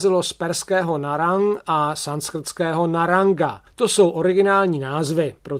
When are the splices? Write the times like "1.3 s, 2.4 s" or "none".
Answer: 3.7 s